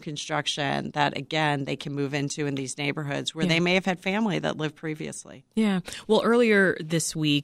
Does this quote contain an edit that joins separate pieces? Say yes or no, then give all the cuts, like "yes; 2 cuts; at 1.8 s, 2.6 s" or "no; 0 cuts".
no; 0 cuts